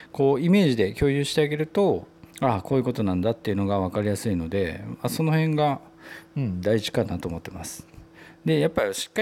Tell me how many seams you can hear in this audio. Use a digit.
1